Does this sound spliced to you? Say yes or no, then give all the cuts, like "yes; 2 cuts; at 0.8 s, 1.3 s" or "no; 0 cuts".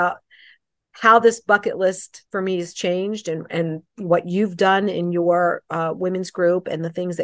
yes; 1 cut; at 2.3 s